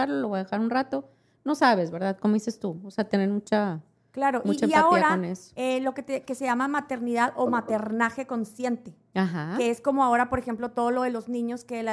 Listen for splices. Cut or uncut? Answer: uncut